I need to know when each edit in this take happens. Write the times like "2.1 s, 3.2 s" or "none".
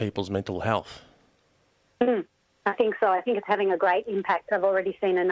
none